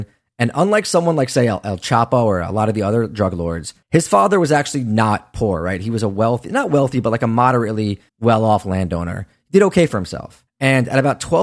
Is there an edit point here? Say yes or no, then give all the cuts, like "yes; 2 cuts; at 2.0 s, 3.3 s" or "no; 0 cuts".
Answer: yes; 3 cuts; at 3.8 s, 8.1 s, 10.5 s